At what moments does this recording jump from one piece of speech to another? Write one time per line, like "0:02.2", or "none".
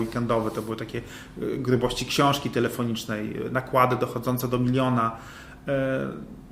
none